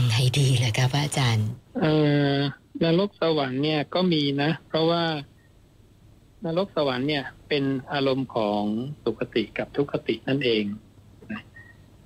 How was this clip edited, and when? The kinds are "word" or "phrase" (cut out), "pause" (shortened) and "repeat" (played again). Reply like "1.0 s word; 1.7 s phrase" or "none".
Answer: 1.7 s pause; 7.4 s pause; 9.0 s pause

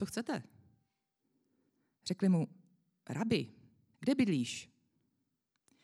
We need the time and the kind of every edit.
3.9 s phrase

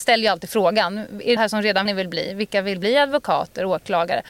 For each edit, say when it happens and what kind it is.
1.4 s word; 1.9 s phrase

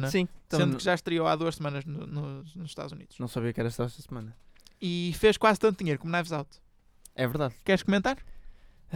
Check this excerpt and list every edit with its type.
none

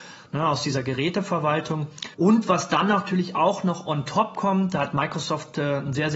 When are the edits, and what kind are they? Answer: 2.1 s pause

